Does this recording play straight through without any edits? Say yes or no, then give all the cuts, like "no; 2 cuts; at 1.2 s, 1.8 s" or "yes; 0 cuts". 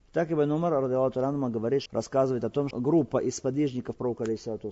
no; 2 cuts; at 1.9 s, 2.7 s